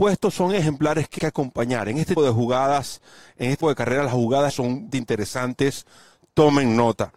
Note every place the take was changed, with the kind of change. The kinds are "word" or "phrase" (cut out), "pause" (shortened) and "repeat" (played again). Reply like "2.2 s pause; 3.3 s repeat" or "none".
1.2 s word; 2.2 s word; 3.6 s word; 4.5 s word; 4.9 s word